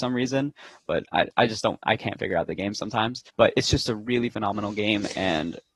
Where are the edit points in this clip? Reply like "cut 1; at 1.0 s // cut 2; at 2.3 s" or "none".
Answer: cut 1; at 1.3 s // cut 2; at 3.3 s